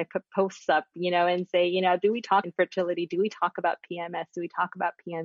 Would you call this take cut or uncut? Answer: cut